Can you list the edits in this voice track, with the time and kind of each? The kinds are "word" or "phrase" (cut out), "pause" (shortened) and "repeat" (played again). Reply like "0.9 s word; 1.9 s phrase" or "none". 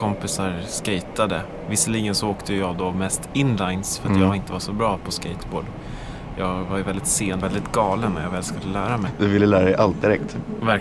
7.4 s phrase